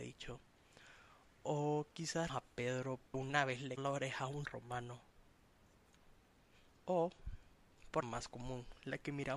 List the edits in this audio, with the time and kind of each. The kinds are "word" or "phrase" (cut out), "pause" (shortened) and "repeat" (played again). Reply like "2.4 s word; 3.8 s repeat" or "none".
2.3 s word; 3.1 s word; 3.8 s word; 4.4 s word; 8.0 s word

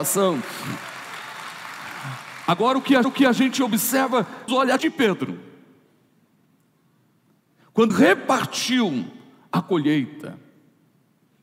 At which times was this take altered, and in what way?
3.0 s repeat; 4.5 s word; 4.8 s word; 7.9 s word

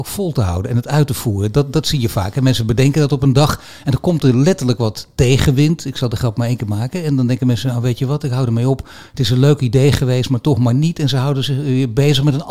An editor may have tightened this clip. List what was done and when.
none

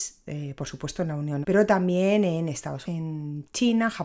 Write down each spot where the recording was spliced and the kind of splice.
1.4 s word; 2.8 s word

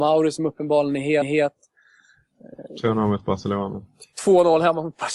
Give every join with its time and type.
1.2 s repeat; 4.1 s pause

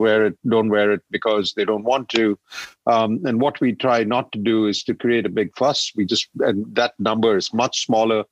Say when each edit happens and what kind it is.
none

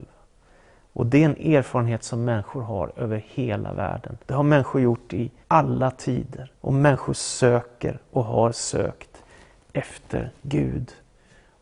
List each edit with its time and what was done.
4.2 s pause; 5.4 s pause; 6.6 s pause; 10.4 s pause

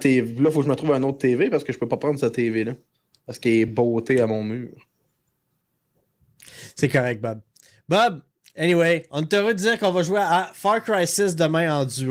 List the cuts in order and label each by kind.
none

